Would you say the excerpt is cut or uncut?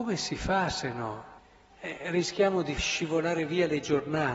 cut